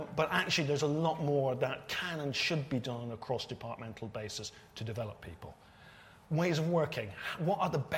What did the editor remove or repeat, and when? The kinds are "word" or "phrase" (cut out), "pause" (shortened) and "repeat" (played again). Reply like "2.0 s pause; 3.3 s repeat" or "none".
none